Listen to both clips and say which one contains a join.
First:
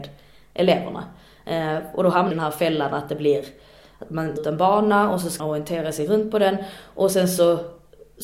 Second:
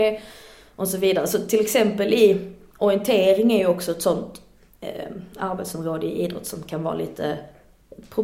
first; 3 cuts; at 2.3 s, 4.4 s, 5.4 s

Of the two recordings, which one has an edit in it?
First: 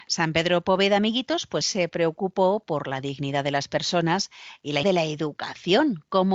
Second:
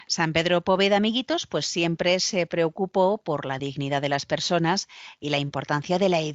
first; 2 cuts; at 1.6 s, 4.8 s

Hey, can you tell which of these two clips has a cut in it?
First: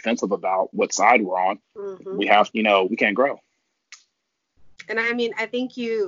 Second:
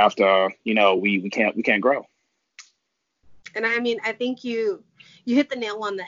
first; 3 cuts; at 1.6 s, 2.5 s, 2.9 s

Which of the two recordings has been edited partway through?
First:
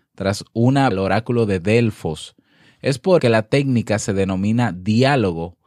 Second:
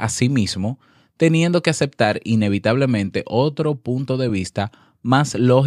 first; 2 cuts; at 0.9 s, 3.2 s

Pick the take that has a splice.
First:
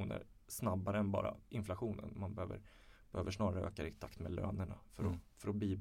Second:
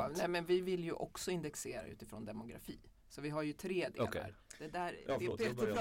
first; 1 cut; at 1.4 s

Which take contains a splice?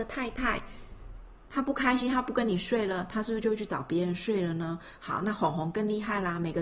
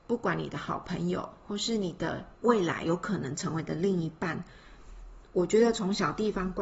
second; 1 cut; at 2.4 s

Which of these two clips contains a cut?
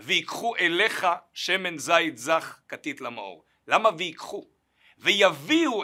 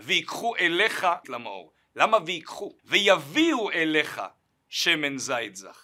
second; 2 cuts; at 1.2 s, 2.8 s

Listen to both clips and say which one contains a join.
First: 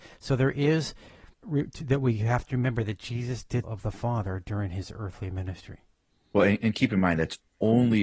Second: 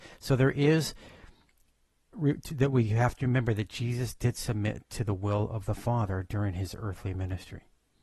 first; 2 cuts; at 1.3 s, 3.6 s

